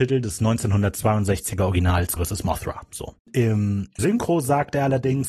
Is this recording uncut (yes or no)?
no